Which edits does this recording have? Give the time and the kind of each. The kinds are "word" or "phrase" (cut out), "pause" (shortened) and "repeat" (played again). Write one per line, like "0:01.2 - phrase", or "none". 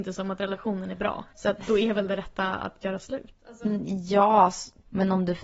0:01.3 - pause